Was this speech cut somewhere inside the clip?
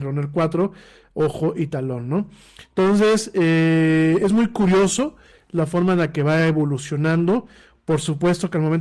no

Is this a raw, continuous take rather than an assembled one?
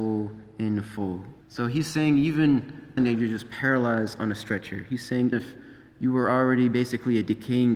no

